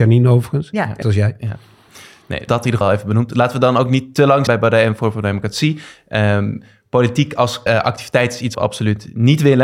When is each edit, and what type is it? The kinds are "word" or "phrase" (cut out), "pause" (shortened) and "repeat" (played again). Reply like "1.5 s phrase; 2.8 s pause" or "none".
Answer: 1.0 s word; 2.5 s word; 2.8 s word; 4.5 s word; 7.7 s word; 8.5 s word